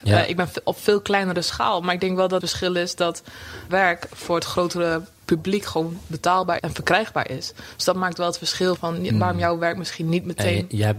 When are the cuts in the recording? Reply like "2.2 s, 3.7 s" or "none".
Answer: 2.4 s, 3.7 s, 6.6 s, 8.8 s